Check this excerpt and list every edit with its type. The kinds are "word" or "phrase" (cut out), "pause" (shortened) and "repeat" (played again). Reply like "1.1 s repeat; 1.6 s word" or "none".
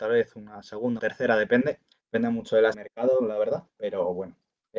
1.0 s word; 1.9 s pause; 2.7 s phrase; 3.7 s pause